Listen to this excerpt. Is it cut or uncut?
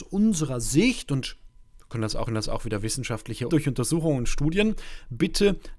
cut